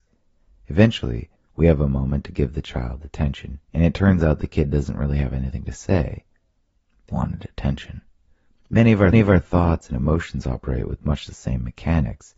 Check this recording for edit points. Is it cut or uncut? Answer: cut